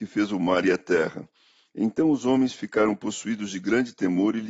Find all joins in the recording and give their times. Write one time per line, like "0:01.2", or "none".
none